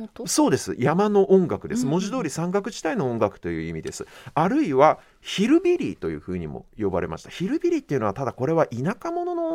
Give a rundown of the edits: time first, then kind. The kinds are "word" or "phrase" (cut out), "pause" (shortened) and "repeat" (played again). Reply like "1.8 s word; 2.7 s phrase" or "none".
none

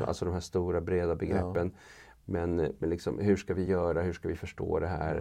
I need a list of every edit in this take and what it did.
none

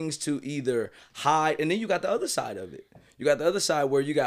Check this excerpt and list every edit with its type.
none

